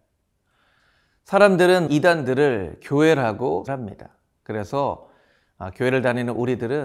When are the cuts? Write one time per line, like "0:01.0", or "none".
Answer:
0:01.9
0:03.7